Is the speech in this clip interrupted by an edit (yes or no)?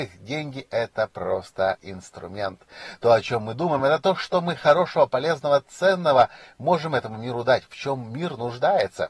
no